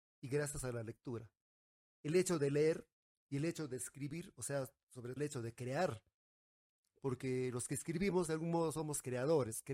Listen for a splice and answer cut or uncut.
cut